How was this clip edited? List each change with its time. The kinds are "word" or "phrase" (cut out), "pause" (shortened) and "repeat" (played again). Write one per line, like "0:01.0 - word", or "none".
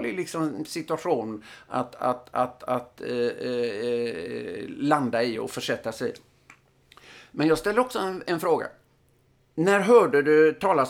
none